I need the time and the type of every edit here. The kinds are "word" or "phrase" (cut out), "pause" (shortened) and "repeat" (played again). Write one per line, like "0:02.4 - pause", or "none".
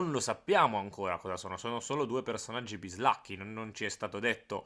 none